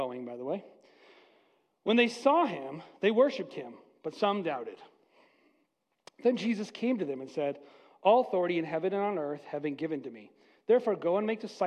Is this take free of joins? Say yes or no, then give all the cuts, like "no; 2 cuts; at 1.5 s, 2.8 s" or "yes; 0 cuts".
yes; 0 cuts